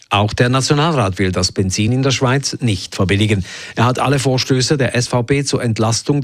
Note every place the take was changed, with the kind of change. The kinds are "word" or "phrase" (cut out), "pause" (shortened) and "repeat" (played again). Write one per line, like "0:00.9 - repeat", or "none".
none